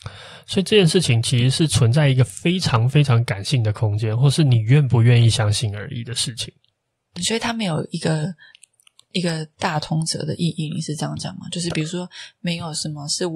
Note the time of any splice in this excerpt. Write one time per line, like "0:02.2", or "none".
0:07.2